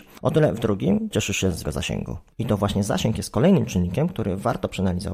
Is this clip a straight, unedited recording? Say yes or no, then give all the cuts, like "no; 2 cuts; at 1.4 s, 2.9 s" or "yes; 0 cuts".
no; 2 cuts; at 1.1 s, 1.6 s